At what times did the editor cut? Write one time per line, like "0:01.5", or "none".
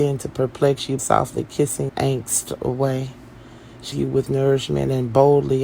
0:01.0
0:01.9
0:03.9

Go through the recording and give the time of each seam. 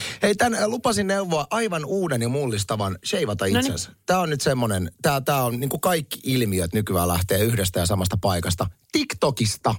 none

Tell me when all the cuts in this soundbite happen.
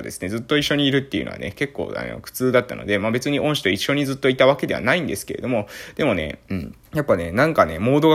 0:06.9

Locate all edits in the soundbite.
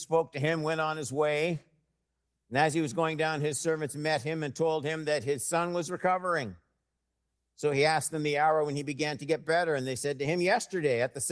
none

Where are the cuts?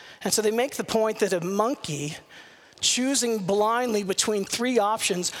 none

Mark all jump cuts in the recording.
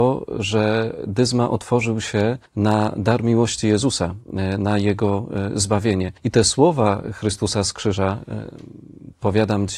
0:02.5
0:06.2

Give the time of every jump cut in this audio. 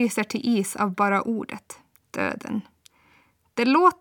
0:02.0

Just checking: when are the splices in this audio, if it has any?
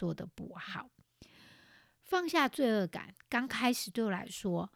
none

